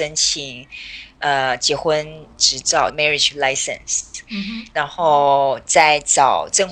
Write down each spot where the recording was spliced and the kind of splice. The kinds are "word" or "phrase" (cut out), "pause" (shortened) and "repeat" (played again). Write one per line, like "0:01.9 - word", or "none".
0:02.3 - pause
0:02.9 - word